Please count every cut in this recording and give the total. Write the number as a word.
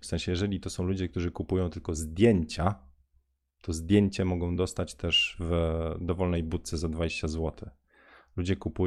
zero